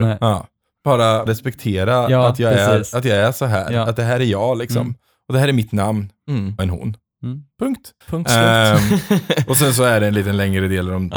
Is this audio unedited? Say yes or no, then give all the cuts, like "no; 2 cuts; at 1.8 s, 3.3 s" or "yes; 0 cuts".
no; 3 cuts; at 1.3 s, 6.6 s, 8.0 s